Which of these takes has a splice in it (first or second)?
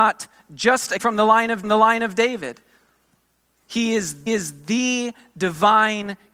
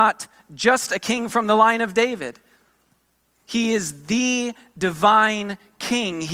first